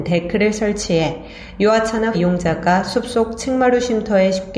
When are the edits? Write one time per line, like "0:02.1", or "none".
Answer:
0:02.1

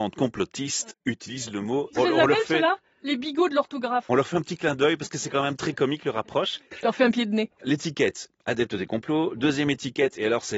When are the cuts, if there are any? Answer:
0:02.0

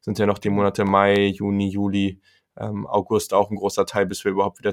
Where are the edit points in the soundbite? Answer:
none

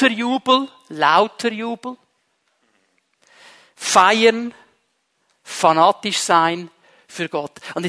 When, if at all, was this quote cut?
none

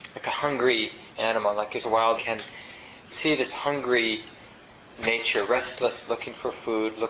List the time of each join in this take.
0:01.1
0:01.8
0:02.2
0:03.1
0:03.5
0:06.1

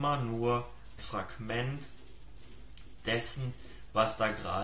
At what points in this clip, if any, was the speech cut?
0:01.0

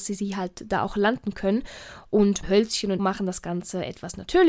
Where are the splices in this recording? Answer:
0:02.4
0:03.0

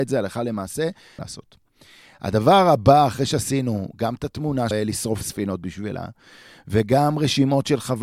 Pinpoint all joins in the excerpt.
0:01.2
0:04.7
0:05.2

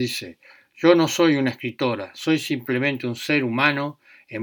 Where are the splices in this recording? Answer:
none

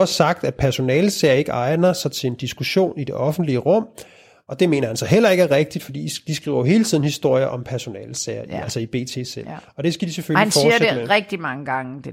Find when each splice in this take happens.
none

